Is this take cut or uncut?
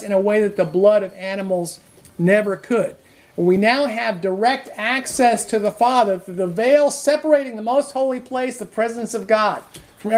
uncut